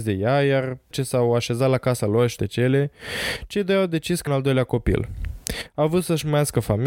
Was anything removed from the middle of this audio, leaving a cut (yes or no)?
yes